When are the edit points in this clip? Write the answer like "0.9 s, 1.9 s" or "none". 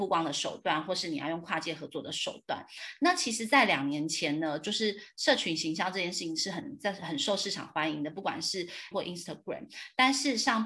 8.9 s